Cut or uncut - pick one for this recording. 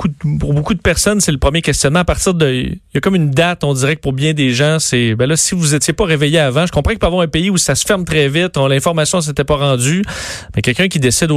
uncut